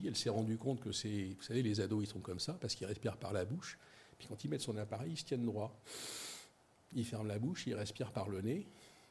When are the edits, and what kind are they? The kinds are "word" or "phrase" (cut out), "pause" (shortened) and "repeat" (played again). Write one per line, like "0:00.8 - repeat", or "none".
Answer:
none